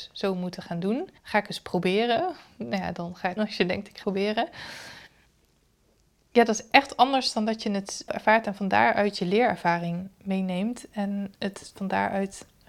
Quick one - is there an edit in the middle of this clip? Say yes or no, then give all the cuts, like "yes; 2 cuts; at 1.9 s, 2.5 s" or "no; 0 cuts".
yes; 4 cuts; at 1.2 s, 3.4 s, 4.0 s, 8.1 s